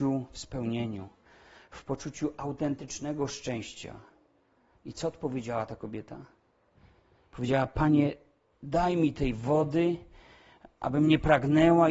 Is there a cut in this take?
no; 0 cuts

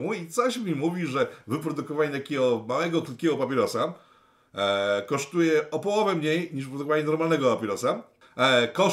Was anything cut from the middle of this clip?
no; 0 cuts

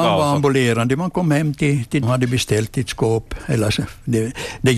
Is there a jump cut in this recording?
yes; 1 cut; at 2.0 s

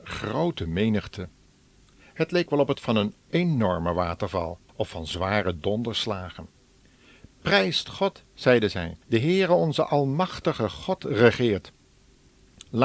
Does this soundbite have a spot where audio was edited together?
yes; 3 cuts; at 2.7 s, 4.7 s, 9.0 s

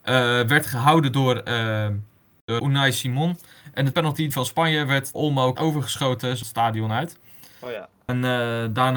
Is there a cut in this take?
yes; 6 cuts; at 2.6 s, 3.9 s, 4.3 s, 5.1 s, 5.6 s, 6.4 s

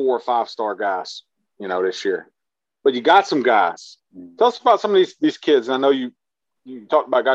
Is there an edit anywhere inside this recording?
no; 0 cuts

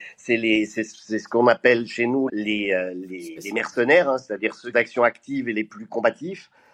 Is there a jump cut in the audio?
yes; 2 cuts; at 2.3 s, 4.7 s

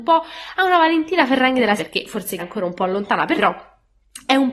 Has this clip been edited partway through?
yes; 3 cuts; at 1.8 s, 2.4 s, 3.4 s

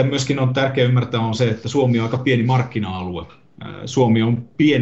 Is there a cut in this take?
no; 0 cuts

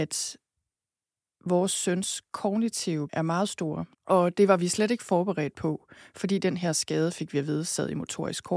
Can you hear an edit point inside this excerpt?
yes; 2 cuts; at 3.1 s, 3.9 s

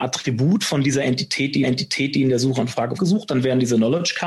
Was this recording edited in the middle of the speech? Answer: yes; 2 cuts; at 1.6 s, 3.0 s

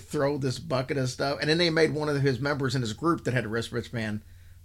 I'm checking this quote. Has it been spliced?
no; 0 cuts

